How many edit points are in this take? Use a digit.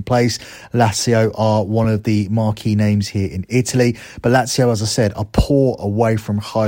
0